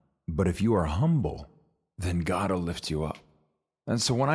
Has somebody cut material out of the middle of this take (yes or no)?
no